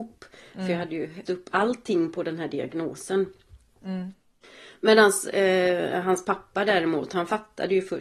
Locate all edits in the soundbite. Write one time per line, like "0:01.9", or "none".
0:01.2